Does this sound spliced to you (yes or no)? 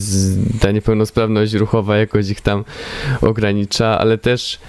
no